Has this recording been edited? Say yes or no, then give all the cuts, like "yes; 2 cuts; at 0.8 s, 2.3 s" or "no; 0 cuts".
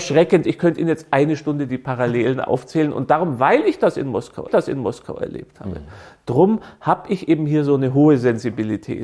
yes; 1 cut; at 4.5 s